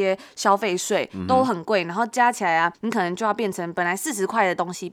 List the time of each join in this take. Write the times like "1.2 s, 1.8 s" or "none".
2.7 s